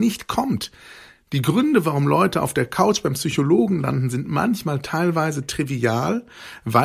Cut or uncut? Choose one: uncut